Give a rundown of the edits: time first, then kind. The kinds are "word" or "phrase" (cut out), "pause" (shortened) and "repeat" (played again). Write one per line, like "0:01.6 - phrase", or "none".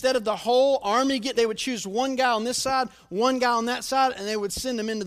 0:01.3 - word